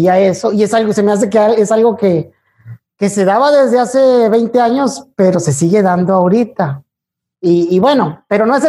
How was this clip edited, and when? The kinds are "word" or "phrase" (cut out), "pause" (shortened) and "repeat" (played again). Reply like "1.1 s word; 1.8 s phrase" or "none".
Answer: none